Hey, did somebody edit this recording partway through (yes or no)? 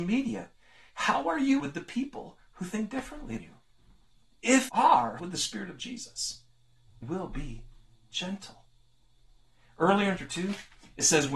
yes